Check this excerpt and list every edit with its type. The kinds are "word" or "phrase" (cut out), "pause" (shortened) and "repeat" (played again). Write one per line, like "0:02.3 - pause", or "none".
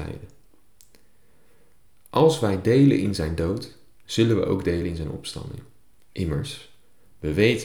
none